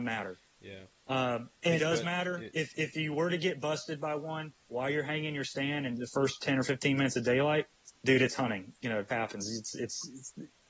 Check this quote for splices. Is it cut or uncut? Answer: cut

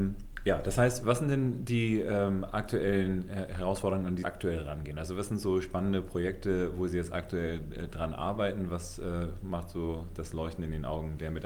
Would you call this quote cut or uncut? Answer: cut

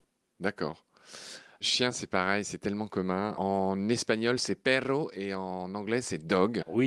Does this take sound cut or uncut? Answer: uncut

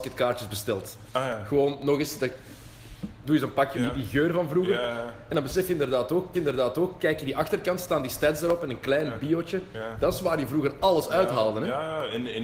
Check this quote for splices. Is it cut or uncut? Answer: cut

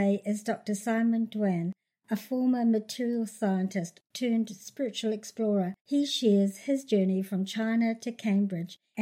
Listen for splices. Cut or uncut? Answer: cut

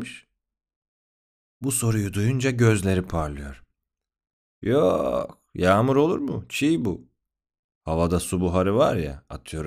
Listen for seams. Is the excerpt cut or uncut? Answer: uncut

